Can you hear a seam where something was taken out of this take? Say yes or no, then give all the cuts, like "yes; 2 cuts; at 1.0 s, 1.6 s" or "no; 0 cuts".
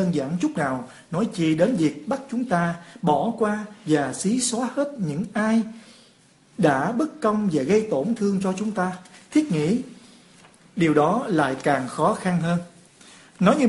no; 0 cuts